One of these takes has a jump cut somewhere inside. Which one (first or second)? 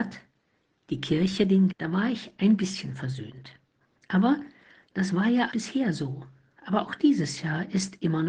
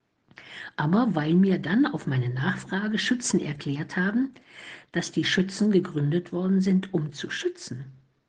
first